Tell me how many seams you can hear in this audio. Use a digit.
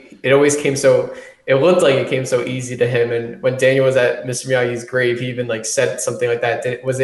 0